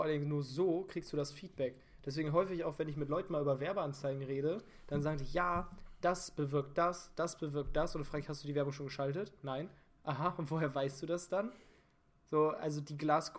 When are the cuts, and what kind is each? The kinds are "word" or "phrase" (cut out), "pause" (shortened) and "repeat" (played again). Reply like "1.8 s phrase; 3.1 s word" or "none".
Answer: none